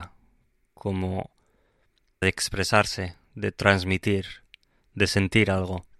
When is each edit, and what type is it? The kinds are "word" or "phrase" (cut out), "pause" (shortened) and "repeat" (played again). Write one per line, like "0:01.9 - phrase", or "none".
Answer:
0:02.2 - word